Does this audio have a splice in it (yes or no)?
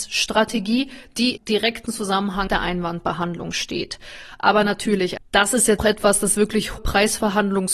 yes